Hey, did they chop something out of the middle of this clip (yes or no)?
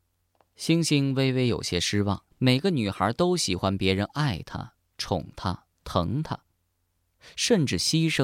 yes